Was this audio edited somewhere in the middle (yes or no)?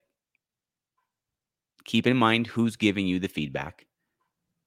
no